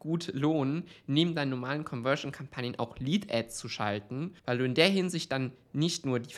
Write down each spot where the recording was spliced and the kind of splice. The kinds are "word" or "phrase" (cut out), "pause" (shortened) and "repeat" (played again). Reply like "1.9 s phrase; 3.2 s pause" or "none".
4.4 s pause

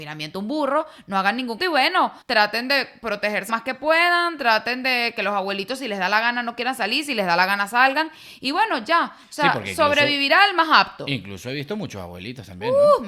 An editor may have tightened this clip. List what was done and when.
1.6 s word; 2.2 s pause; 3.5 s word

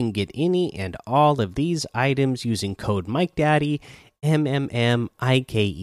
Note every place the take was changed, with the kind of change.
none

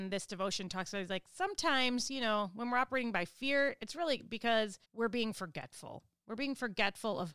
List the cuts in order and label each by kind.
4.8 s pause

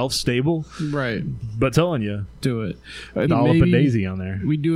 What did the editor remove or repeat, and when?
1.7 s word; 2.4 s word; 3.3 s word

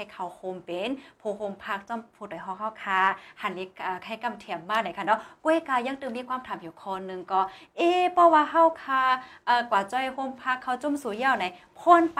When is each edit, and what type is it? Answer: none

